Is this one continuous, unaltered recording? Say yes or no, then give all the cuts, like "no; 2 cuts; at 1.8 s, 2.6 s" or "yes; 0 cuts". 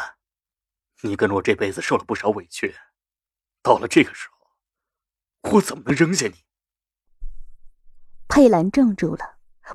yes; 0 cuts